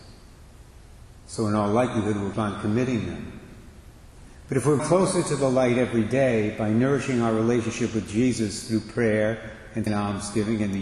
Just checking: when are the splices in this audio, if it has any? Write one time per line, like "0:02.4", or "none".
0:02.3
0:04.8
0:09.9